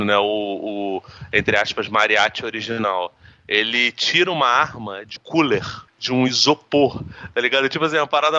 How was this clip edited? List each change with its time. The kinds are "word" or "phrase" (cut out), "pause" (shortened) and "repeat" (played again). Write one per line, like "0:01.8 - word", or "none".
0:05.2 - word
0:05.9 - pause